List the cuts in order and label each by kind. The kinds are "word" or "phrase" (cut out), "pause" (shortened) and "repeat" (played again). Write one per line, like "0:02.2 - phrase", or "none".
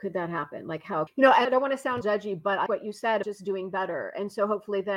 0:01.1 - word
0:01.4 - word
0:02.0 - word
0:02.7 - word
0:03.2 - word

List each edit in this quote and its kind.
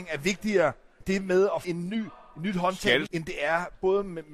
0:01.0 - word
0:01.6 - word
0:03.1 - word

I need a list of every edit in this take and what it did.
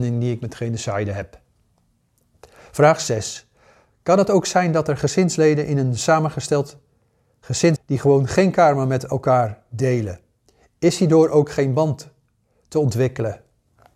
0:07.8 - word

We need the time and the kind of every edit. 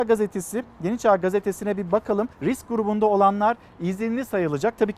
0:02.3 - pause

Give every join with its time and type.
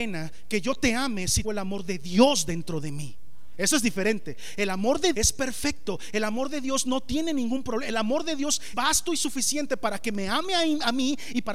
0:01.4 - word
0:05.1 - word
0:08.7 - word

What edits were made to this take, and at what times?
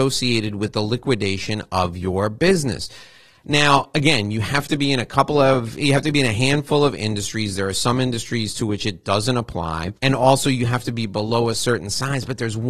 0:10.0 - pause

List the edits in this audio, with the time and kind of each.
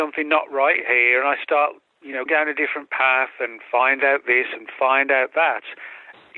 0:02.3 - word

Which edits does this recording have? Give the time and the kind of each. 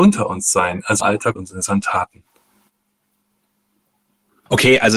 0:01.0 - phrase
0:01.4 - word

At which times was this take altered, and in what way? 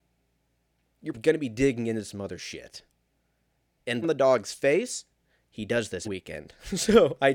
0:01.1 - word
0:04.0 - phrase
0:06.0 - word

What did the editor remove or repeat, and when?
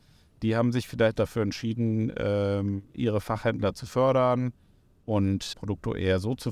0:01.1 - word
0:05.5 - word

